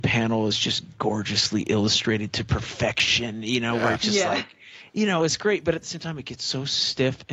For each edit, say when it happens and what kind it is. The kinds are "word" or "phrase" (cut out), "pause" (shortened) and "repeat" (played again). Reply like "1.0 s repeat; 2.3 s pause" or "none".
none

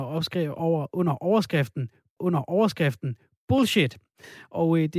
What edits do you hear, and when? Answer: 2.2 s repeat

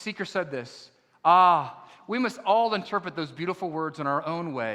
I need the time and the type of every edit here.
none

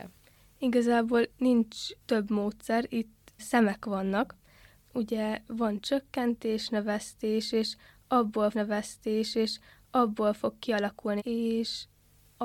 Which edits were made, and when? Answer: 1.3 s word; 2.0 s pause; 3.4 s word; 4.8 s word; 8.5 s repeat; 11.2 s phrase

